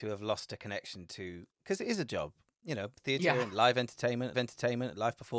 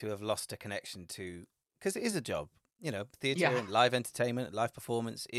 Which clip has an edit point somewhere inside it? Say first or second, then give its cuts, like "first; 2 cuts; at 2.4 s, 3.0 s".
first; 2 cuts; at 1.5 s, 4.3 s